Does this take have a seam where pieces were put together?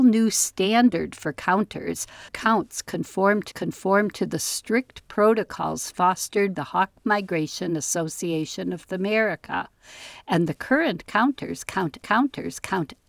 yes; 5 cuts; at 2.3 s, 3.5 s, 6.6 s, 8.8 s, 12.0 s

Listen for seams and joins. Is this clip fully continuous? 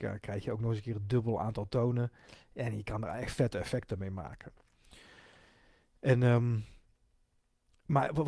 yes; 0 cuts

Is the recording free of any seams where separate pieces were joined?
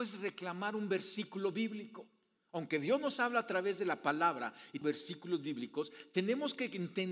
no; 1 cut; at 4.8 s

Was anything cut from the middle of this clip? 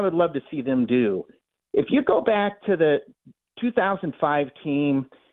no; 0 cuts

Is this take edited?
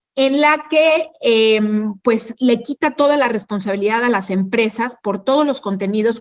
no; 0 cuts

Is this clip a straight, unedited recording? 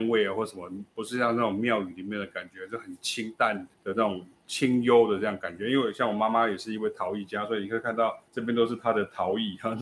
no; 2 cuts; at 3.7 s, 8.3 s

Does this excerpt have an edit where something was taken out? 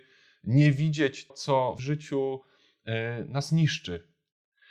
yes; 2 cuts; at 1.3 s, 1.8 s

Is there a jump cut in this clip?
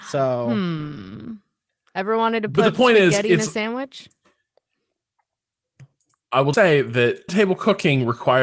yes; 2 cuts; at 6.5 s, 7.3 s

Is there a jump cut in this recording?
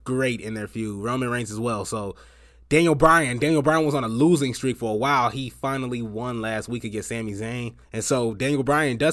yes; 1 cut; at 7.8 s

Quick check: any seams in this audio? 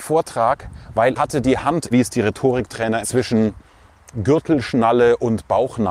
yes; 3 cuts; at 1.2 s, 1.9 s, 3.0 s

